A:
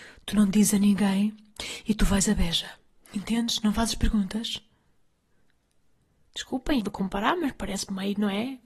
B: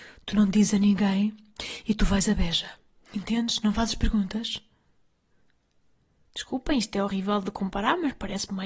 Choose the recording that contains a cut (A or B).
A